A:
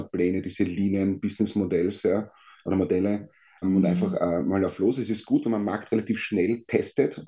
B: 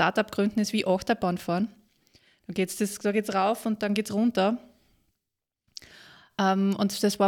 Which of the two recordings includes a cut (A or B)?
A